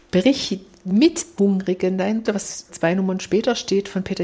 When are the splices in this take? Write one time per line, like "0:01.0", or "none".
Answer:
0:01.4
0:02.2
0:02.7